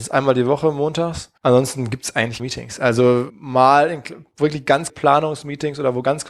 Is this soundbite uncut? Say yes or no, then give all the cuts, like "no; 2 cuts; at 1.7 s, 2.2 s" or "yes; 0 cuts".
no; 4 cuts; at 1.4 s, 2.4 s, 3.3 s, 4.9 s